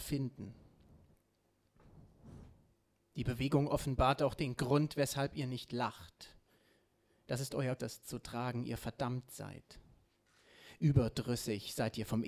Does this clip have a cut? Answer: yes; 1 cut; at 7.8 s

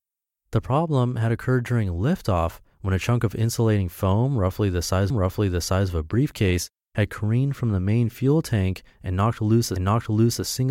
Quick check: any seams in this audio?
yes; 2 cuts; at 5.1 s, 9.8 s

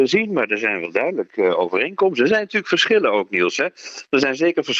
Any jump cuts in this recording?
no; 0 cuts

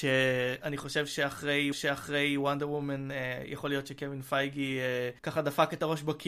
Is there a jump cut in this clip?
yes; 2 cuts; at 1.7 s, 5.2 s

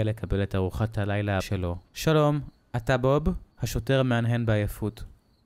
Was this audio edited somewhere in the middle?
yes; 3 cuts; at 1.4 s, 1.8 s, 3.5 s

